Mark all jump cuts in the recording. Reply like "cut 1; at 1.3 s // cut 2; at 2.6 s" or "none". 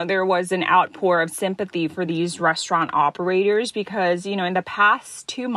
none